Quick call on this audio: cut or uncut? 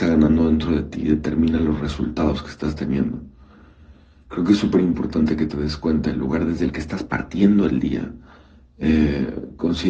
uncut